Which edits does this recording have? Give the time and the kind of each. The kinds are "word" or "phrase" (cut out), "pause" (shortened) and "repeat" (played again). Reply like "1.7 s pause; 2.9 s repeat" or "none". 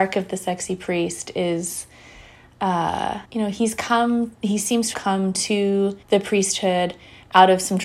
3.2 s pause; 4.9 s word; 6.0 s pause

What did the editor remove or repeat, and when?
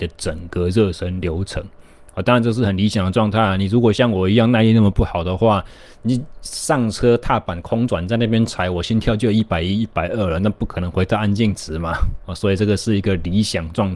2.1 s pause

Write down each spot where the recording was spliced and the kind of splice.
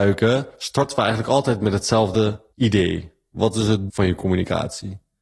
2.5 s pause; 3.9 s word

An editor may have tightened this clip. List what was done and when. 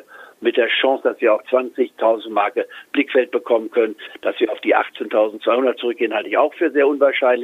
1.4 s word; 2.9 s phrase

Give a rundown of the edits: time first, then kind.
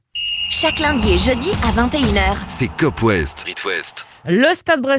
3.4 s word

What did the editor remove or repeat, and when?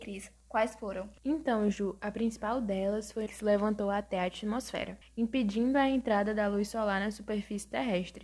1.2 s pause; 3.3 s phrase; 5.0 s pause

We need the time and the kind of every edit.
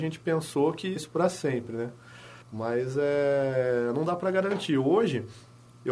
1.0 s word; 2.4 s pause

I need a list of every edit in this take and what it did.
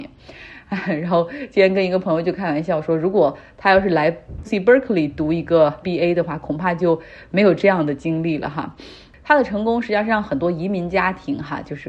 4.4 s word; 5.8 s word

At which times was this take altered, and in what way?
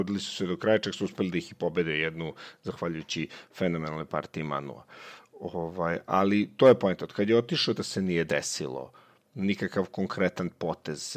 7.8 s phrase

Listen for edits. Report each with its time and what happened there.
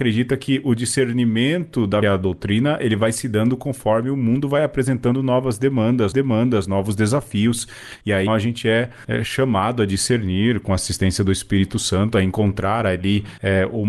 2.0 s phrase; 6.1 s repeat; 8.3 s word

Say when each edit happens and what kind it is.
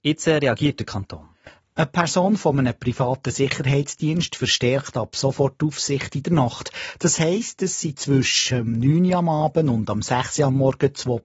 none

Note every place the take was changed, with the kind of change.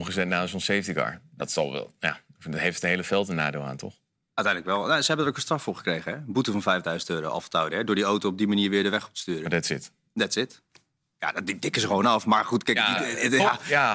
none

